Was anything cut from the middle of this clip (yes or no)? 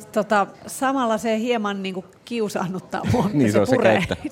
yes